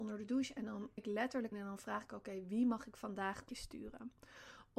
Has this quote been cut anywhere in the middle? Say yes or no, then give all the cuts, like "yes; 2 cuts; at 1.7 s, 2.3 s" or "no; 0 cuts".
yes; 3 cuts; at 1.0 s, 1.5 s, 3.5 s